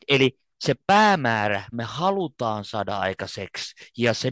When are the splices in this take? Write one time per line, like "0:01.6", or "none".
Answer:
0:01.7